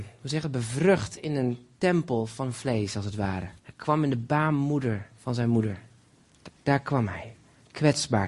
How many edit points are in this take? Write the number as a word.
one